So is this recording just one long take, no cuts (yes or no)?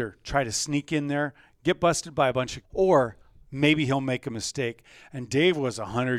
no